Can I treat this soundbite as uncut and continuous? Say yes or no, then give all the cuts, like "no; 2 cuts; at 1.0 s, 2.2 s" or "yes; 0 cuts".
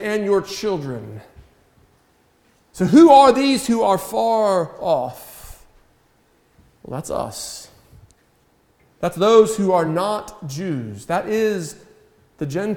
yes; 0 cuts